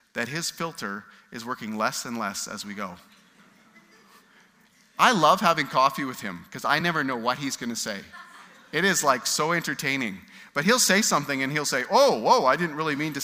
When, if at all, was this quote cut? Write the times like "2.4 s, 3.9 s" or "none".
none